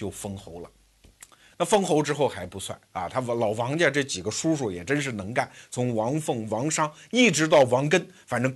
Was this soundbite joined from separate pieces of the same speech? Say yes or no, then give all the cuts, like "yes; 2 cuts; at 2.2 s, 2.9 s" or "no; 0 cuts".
no; 0 cuts